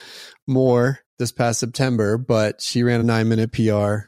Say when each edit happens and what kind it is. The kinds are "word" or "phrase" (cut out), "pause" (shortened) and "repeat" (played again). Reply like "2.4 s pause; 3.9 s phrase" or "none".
1.1 s pause; 3.0 s word